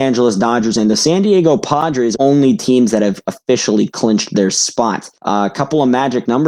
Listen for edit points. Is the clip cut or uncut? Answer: cut